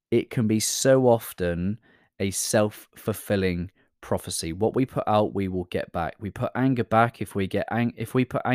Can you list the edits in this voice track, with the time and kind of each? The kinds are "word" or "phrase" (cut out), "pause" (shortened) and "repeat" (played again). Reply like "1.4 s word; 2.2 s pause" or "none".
none